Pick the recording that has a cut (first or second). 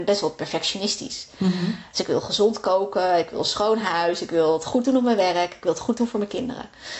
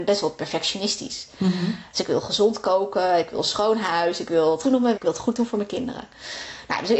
second